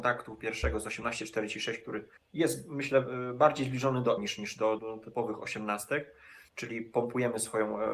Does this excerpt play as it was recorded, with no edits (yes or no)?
no